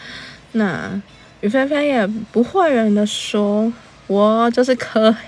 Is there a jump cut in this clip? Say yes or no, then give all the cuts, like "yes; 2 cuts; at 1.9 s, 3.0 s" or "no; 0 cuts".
no; 0 cuts